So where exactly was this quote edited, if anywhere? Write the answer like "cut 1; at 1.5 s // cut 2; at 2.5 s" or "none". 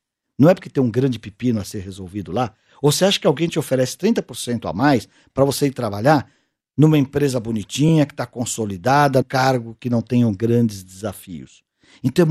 cut 1; at 9.2 s